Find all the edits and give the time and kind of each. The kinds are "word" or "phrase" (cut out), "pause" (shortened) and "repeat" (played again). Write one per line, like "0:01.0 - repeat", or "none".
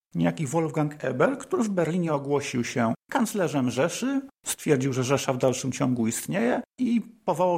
none